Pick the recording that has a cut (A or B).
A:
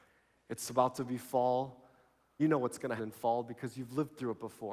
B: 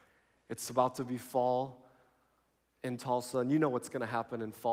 A